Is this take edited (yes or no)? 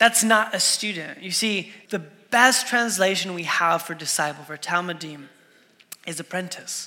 yes